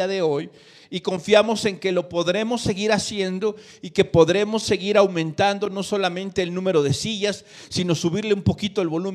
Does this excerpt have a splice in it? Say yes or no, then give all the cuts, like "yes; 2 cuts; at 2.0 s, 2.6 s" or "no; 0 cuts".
no; 0 cuts